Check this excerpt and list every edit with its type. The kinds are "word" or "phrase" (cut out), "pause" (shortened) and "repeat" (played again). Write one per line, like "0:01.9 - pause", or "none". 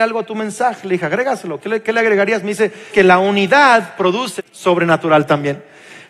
0:02.9 - word
0:04.4 - phrase